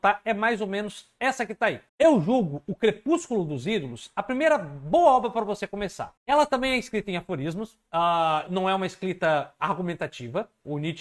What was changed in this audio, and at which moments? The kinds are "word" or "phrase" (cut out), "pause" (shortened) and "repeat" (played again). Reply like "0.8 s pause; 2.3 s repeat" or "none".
1.9 s pause; 6.2 s pause; 8.5 s word